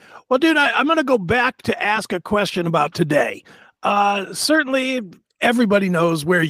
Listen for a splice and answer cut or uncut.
uncut